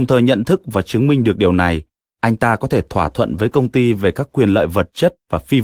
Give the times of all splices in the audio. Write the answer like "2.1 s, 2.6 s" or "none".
none

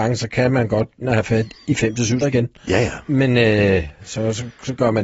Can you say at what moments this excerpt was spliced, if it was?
1.0 s, 2.2 s

